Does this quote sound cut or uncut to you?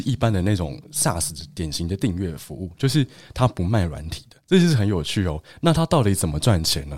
cut